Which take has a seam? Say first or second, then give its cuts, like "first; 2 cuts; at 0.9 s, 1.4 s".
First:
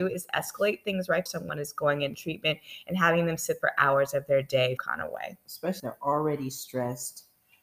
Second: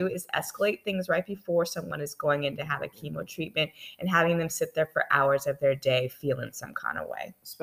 first; 5 cuts; at 1.3 s, 2.1 s, 3.6 s, 4.8 s, 5.8 s